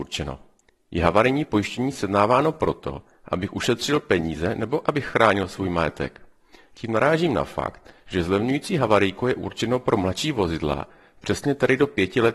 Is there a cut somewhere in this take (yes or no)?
no